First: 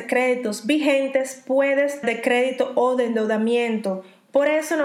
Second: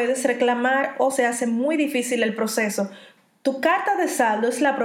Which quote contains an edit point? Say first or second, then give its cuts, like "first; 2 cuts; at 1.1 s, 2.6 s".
first; 1 cut; at 2.0 s